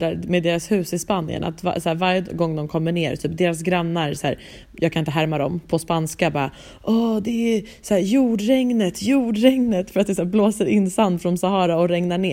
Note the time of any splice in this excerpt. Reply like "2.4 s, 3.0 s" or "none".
none